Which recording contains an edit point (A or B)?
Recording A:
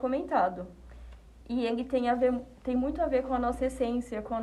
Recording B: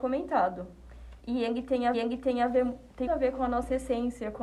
B